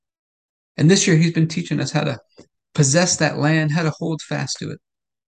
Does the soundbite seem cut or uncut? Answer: uncut